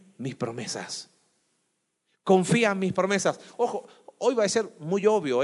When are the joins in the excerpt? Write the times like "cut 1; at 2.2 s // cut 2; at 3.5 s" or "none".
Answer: none